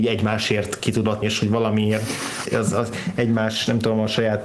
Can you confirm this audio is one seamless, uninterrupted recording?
no; 2 cuts; at 1.2 s, 2.4 s

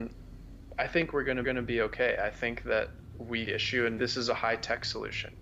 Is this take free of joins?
no; 3 cuts; at 1.4 s, 3.5 s, 4.0 s

